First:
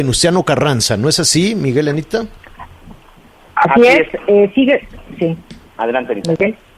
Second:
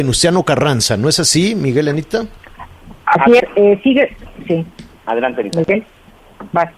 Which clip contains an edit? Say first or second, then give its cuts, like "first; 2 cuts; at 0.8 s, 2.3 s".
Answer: second; 2 cuts; at 3.0 s, 3.4 s